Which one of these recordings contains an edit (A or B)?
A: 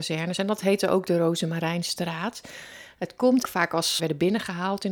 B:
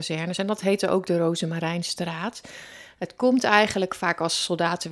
A